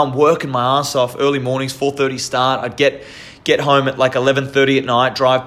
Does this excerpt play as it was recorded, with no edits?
yes; 0 cuts

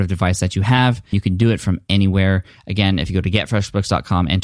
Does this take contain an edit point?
yes; 1 cut; at 1.1 s

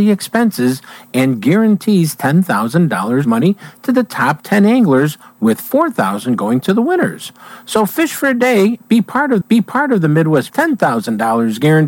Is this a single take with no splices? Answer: no; 3 cuts; at 3.2 s, 9.4 s, 10.5 s

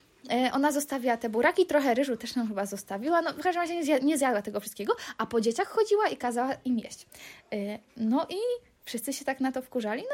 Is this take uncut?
yes; 0 cuts

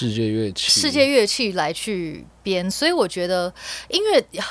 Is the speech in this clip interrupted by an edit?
no; 0 cuts

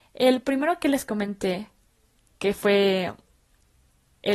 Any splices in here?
no; 0 cuts

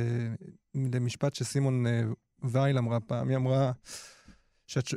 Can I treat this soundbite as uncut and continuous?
yes; 0 cuts

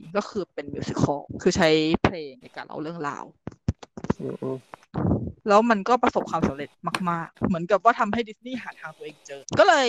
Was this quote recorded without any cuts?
no; 1 cut; at 7.4 s

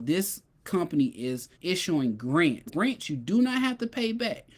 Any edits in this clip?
yes; 2 cuts; at 1.5 s, 2.7 s

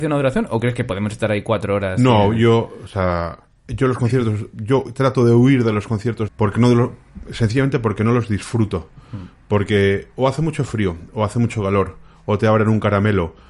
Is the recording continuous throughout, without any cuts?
no; 1 cut; at 6.3 s

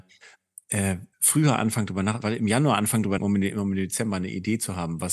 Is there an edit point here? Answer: yes; 2 cuts; at 1.1 s, 3.2 s

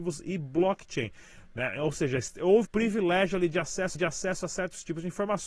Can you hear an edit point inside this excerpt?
yes; 2 cuts; at 2.6 s, 3.9 s

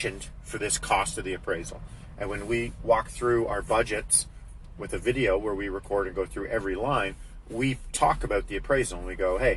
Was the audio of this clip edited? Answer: no; 0 cuts

